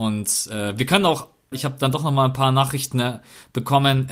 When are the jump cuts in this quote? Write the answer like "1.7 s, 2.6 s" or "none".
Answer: 1.5 s